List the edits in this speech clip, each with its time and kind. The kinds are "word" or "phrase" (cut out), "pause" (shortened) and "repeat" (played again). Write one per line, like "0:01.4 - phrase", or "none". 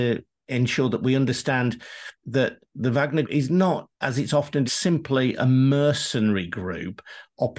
0:02.2 - pause
0:03.2 - word
0:03.9 - pause
0:04.7 - word